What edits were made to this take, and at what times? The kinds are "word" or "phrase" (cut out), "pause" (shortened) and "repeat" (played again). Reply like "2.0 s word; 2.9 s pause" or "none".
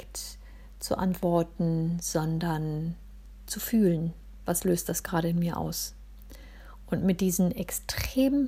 none